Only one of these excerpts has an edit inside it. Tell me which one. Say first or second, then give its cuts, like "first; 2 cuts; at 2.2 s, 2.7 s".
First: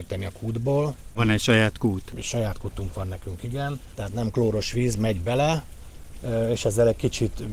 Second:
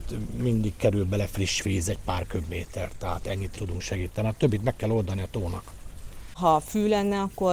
second; 1 cut; at 3.6 s